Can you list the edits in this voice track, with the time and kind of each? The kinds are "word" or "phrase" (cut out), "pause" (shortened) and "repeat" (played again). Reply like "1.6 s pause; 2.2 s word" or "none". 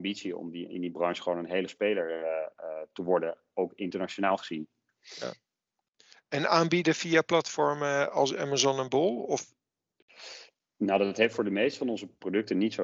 1.7 s word